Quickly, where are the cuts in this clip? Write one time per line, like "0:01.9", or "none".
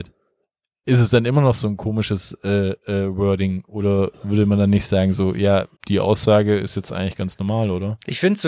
0:05.8